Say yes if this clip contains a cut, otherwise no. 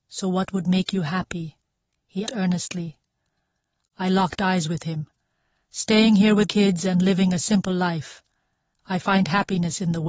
yes